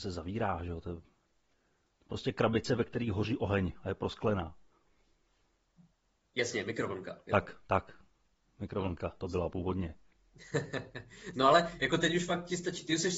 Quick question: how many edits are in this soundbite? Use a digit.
1